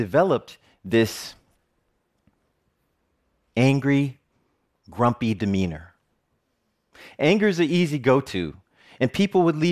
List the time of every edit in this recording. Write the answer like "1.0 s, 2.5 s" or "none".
none